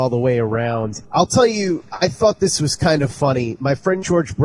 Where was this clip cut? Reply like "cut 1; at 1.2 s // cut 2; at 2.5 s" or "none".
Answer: cut 1; at 1.0 s